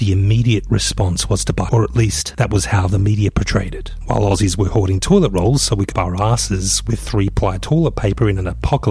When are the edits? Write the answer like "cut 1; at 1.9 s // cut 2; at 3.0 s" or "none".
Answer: cut 1; at 1.7 s // cut 2; at 5.9 s